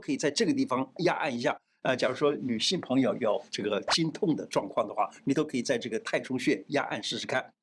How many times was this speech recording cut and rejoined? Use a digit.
1